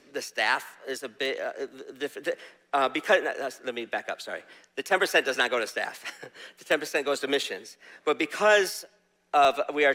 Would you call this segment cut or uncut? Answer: uncut